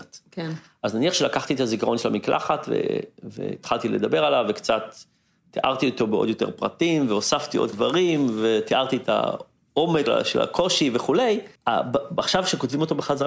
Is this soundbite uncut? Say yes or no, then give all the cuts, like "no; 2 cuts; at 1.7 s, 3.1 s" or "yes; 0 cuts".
no; 3 cuts; at 7.7 s, 10.1 s, 11.6 s